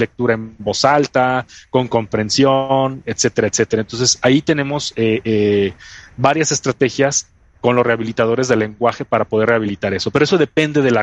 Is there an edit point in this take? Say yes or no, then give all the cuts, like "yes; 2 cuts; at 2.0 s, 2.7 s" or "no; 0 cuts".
no; 0 cuts